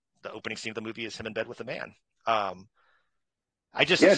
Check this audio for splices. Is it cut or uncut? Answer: uncut